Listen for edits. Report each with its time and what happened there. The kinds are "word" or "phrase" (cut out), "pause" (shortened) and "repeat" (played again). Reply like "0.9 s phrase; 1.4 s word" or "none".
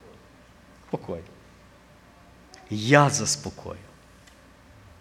none